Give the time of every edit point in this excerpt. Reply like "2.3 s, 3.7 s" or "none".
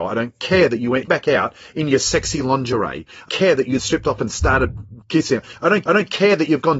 1.1 s, 3.3 s, 3.8 s, 5.0 s, 5.9 s